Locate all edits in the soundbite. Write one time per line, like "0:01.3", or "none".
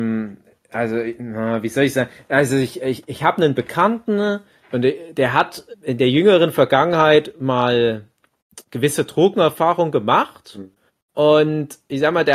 0:03.1
0:04.6
0:05.7
0:08.7
0:10.9